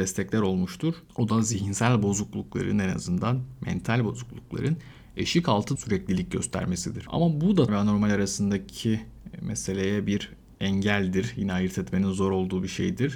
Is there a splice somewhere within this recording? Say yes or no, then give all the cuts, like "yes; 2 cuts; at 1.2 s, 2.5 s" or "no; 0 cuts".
yes; 2 cuts; at 5.8 s, 7.7 s